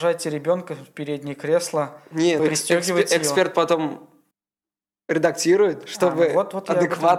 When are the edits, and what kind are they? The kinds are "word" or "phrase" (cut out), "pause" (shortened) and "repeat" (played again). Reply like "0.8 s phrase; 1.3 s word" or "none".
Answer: 2.4 s word; 4.3 s pause